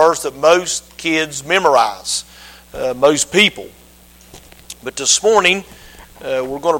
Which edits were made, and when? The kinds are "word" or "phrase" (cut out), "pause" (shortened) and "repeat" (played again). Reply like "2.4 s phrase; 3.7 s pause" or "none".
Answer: none